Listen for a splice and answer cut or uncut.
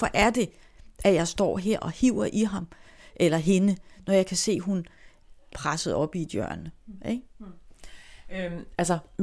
cut